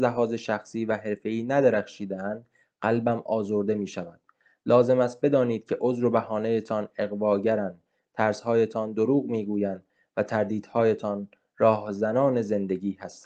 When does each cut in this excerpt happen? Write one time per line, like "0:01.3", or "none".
none